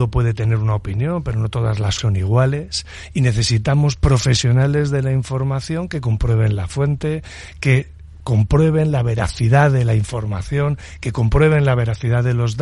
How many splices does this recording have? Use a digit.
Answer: 1